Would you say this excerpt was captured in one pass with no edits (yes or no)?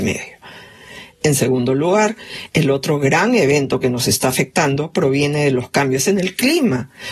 yes